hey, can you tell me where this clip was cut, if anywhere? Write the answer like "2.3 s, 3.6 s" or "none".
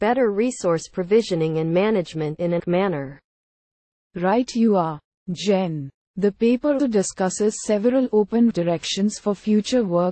2.6 s, 6.8 s, 8.5 s